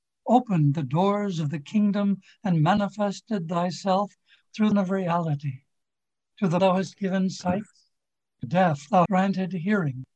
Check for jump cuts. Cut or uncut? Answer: cut